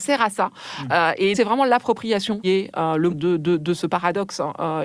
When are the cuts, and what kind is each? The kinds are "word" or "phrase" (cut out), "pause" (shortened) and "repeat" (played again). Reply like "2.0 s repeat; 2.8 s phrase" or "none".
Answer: 1.3 s word; 2.4 s word; 3.1 s word

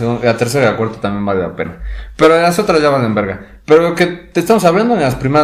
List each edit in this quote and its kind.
none

